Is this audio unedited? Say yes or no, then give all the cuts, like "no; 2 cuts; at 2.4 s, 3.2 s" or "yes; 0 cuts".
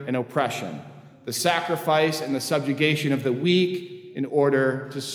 yes; 0 cuts